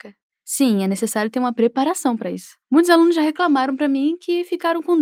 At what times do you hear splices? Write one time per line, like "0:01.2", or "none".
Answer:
0:02.6